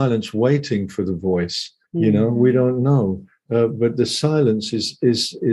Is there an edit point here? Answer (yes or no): yes